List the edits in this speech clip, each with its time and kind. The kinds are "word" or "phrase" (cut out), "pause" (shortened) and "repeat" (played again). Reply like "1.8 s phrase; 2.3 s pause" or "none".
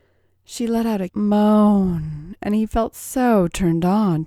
1.1 s word